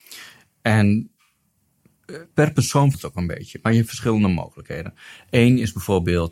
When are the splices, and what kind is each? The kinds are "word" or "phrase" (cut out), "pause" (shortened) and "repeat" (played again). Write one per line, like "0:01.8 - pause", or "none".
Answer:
0:02.3 - pause
0:02.9 - word
0:03.9 - word